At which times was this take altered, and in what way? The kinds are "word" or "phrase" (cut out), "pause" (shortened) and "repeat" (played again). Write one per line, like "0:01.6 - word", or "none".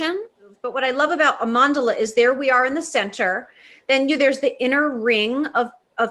none